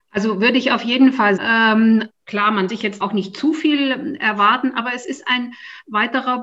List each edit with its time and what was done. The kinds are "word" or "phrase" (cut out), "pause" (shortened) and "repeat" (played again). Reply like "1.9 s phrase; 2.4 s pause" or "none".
1.4 s word; 2.1 s word; 2.7 s word; 3.0 s word